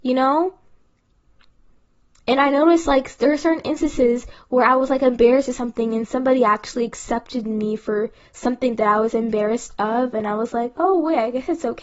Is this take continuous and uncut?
yes; 0 cuts

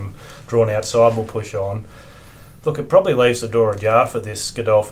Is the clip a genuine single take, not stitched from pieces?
yes; 0 cuts

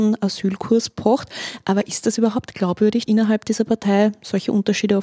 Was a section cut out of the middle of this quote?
yes; 1 cut; at 3.1 s

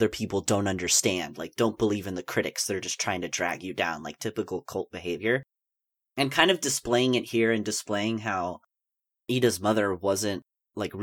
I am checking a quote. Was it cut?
no; 0 cuts

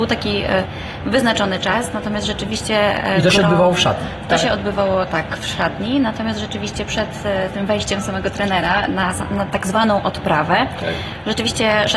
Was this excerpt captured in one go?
yes; 0 cuts

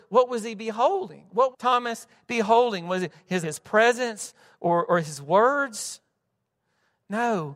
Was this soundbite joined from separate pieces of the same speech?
yes; 3 cuts; at 1.5 s, 3.4 s, 4.9 s

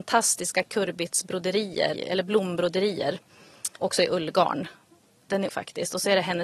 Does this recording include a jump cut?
yes; 3 cuts; at 1.9 s, 3.8 s, 5.5 s

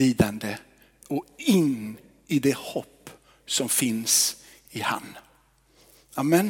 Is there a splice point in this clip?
no; 0 cuts

